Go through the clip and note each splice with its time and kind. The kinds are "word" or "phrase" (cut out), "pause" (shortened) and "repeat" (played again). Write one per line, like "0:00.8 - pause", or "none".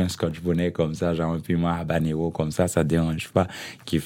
none

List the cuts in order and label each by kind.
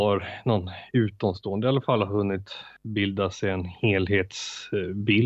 0:02.8 - pause

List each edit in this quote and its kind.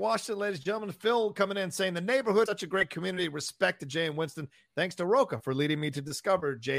0:02.5 - word

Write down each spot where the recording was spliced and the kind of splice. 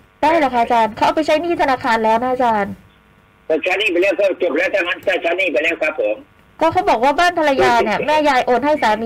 none

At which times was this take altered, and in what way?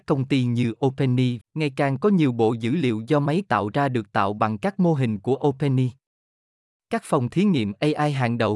0:01.4 - phrase

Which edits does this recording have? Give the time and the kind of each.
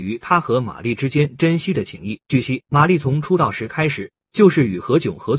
0:02.2 - pause

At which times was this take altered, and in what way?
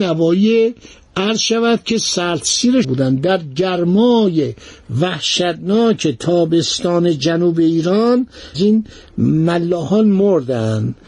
0:02.8 - phrase
0:08.5 - phrase

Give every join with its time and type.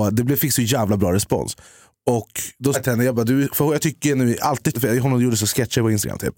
0:02.7 - word
0:04.7 - word

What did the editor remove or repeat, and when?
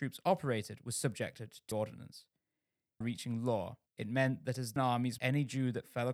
0:01.7 - word
0:03.0 - phrase
0:03.9 - pause
0:04.8 - word
0:05.2 - word

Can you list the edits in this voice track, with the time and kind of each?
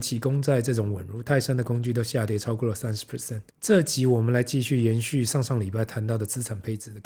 0:03.5 - pause

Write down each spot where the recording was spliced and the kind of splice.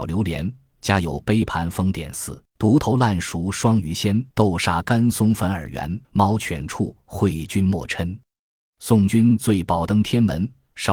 0:02.5 - pause
0:04.3 - pause
0:06.0 - pause

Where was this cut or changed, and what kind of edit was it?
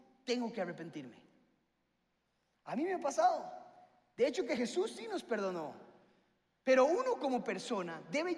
none

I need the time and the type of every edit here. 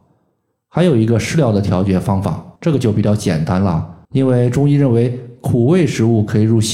0:02.6 - pause
0:04.0 - pause

